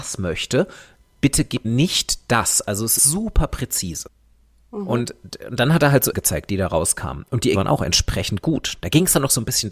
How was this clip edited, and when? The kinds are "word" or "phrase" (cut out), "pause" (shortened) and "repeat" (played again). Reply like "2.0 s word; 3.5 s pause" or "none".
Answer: 1.6 s word; 3.0 s word; 6.1 s word; 7.5 s word